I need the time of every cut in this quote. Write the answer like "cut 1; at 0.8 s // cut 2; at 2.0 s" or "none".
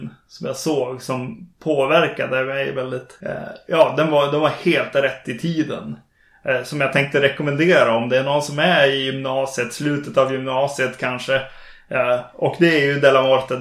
none